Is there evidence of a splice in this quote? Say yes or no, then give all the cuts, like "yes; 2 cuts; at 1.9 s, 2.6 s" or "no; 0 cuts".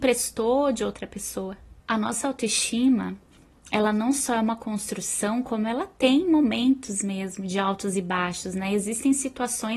yes; 1 cut; at 1.8 s